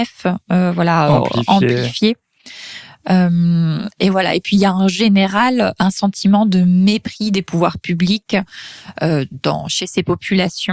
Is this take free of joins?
no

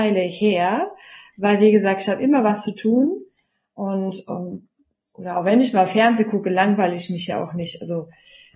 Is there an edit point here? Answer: no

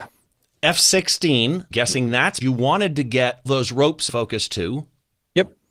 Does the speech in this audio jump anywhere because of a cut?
yes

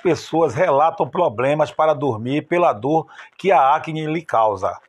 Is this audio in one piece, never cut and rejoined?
yes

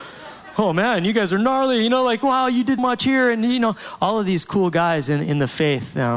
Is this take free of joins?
no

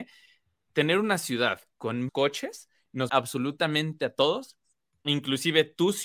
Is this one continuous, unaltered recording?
no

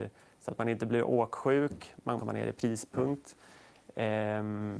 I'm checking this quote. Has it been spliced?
yes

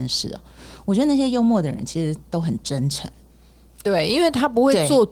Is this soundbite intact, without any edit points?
yes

